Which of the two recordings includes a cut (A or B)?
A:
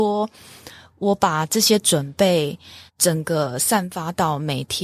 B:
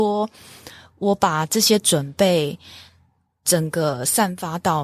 A